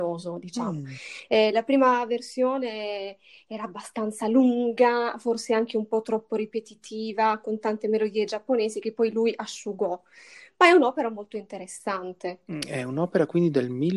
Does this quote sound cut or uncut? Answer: uncut